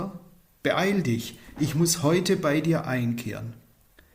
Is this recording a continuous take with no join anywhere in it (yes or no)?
yes